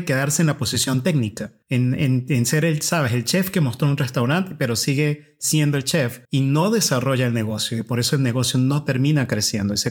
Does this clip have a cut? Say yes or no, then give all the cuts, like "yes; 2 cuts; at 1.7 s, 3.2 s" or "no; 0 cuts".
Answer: yes; 2 cuts; at 1.6 s, 6.2 s